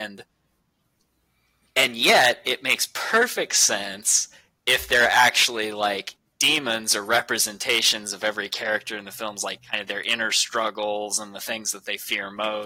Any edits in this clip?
no; 0 cuts

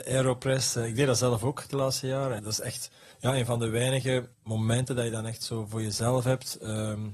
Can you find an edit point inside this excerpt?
yes; 3 cuts; at 2.4 s, 3.1 s, 4.3 s

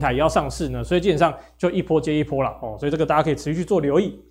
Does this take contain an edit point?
no; 0 cuts

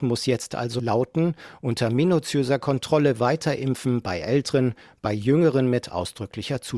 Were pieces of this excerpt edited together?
no; 0 cuts

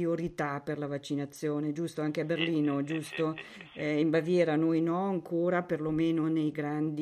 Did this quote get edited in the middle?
no; 0 cuts

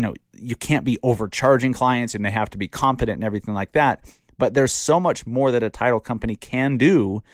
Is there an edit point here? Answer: no; 0 cuts

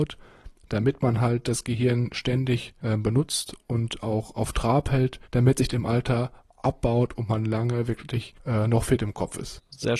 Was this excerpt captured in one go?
no; 2 cuts; at 5.2 s, 5.7 s

